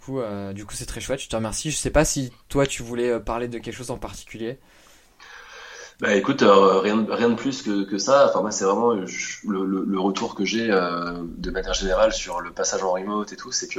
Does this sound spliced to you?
no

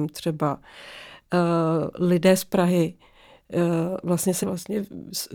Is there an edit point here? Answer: yes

